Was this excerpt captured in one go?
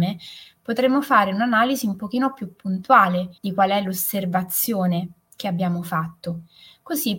no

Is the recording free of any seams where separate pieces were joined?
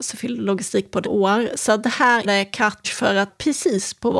no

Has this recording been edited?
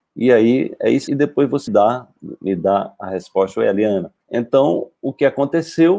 yes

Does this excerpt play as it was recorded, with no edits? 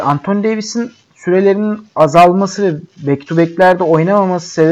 yes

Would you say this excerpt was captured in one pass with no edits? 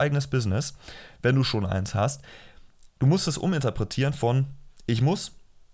no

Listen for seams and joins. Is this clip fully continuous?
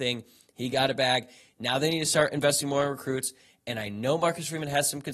yes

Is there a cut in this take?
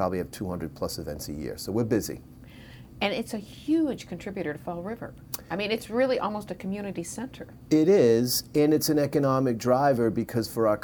no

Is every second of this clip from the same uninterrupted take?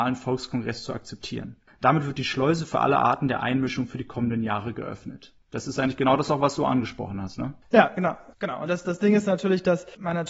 no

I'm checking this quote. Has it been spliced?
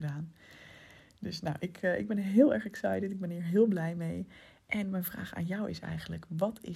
no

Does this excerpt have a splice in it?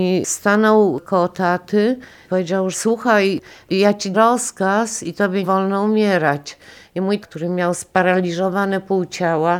yes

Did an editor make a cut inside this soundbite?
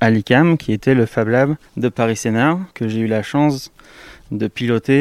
yes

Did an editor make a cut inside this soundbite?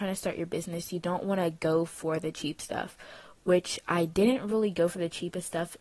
no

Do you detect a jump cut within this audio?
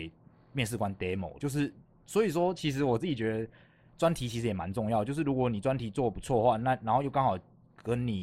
yes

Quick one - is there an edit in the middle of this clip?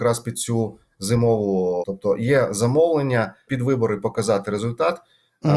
yes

